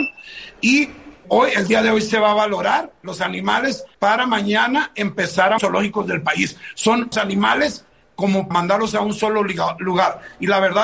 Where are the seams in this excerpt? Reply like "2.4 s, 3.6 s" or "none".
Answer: 1.2 s, 3.9 s, 5.6 s, 7.1 s, 8.5 s